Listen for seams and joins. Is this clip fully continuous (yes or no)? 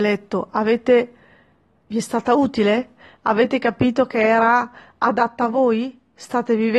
yes